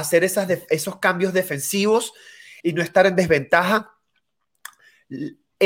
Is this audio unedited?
no; 1 cut; at 2.6 s

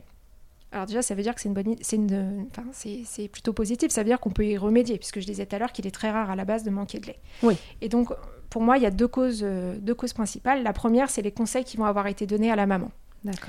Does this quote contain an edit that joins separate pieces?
no; 0 cuts

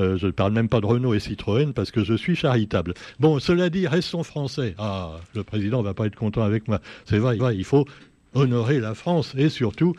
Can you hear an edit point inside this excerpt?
yes; 1 cut; at 7.4 s

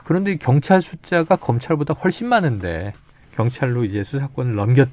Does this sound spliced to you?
no; 0 cuts

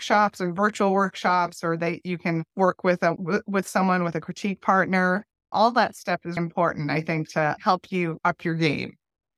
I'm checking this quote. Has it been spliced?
yes; 3 cuts; at 2.5 s, 3.2 s, 6.4 s

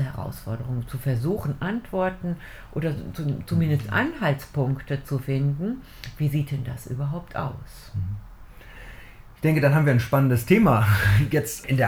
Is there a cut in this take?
no; 0 cuts

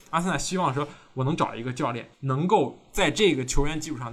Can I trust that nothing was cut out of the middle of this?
no; 1 cut; at 2.1 s

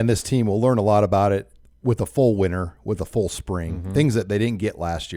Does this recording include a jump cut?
no; 0 cuts

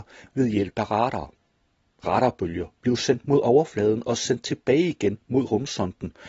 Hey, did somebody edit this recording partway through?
no; 0 cuts

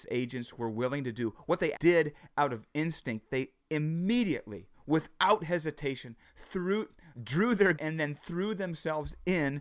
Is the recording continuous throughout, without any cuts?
no; 3 cuts; at 1.7 s, 7.1 s, 7.7 s

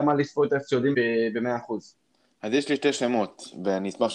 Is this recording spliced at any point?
yes; 1 cut; at 0.9 s

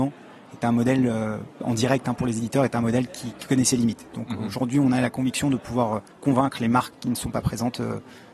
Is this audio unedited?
no; 1 cut; at 6.1 s

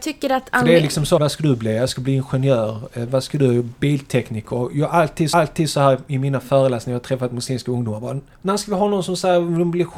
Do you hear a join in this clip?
yes; 3 cuts; at 1.2 s, 5.3 s, 8.3 s

